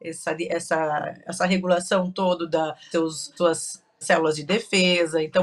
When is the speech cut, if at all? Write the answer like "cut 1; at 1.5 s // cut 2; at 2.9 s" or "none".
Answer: cut 1; at 2.9 s // cut 2; at 3.4 s // cut 3; at 4.0 s